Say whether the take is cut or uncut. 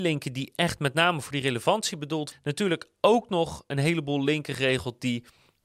cut